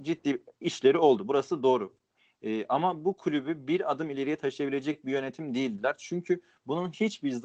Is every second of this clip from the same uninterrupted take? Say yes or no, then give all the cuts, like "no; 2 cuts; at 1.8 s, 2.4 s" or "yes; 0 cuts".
yes; 0 cuts